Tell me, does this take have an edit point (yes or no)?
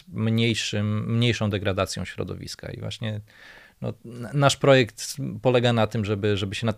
no